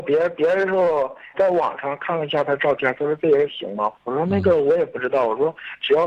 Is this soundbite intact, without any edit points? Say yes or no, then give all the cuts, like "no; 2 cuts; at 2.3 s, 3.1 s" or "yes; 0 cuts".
no; 2 cuts; at 1.3 s, 4.0 s